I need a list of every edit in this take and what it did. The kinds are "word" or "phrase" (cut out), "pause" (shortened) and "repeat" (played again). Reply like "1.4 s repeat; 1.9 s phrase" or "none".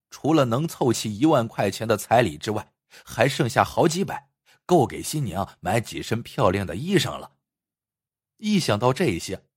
none